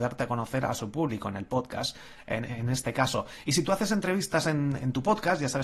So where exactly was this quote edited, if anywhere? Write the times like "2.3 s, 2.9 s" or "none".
none